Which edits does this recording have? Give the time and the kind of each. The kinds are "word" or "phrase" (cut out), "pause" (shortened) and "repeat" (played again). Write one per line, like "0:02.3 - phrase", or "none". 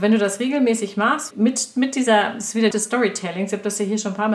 0:01.3 - word
0:02.7 - phrase